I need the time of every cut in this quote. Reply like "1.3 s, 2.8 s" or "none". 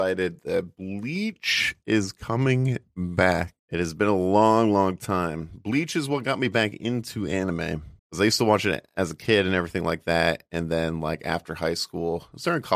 3.6 s, 8.0 s